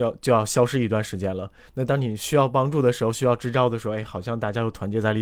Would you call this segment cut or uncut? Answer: uncut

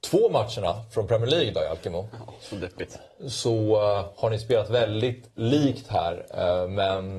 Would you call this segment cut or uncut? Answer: uncut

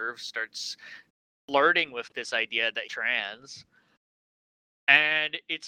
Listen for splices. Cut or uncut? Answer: cut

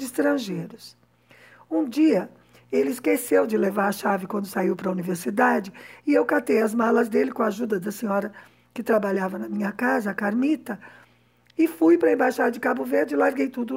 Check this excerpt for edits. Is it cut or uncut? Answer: uncut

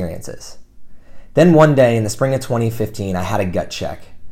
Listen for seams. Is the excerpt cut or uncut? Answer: uncut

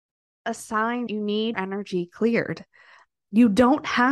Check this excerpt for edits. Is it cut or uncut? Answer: cut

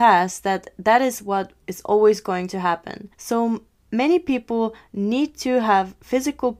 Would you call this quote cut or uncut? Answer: cut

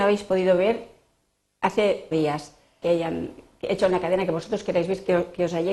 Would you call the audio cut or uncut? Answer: cut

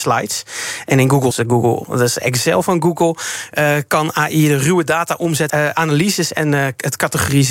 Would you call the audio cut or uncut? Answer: cut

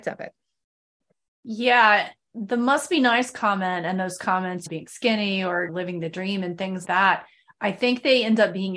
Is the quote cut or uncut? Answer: cut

